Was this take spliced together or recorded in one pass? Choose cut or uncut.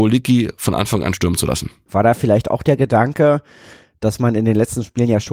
uncut